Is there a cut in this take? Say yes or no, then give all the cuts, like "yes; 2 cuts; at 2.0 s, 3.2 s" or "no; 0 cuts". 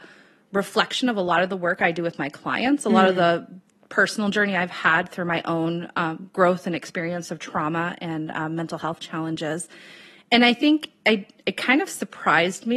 no; 0 cuts